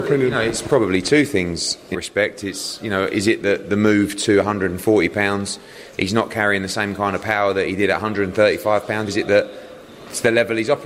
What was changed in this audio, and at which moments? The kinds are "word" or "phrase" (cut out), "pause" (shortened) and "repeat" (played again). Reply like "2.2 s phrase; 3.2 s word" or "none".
1.9 s word; 9.1 s word